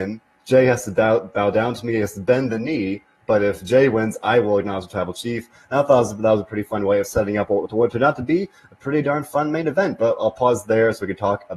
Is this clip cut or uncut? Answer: uncut